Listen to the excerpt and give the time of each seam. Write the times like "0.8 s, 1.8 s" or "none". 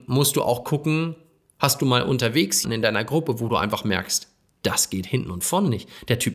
2.6 s